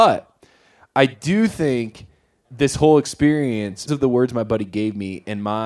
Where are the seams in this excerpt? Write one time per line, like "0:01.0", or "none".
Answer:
0:02.4
0:03.9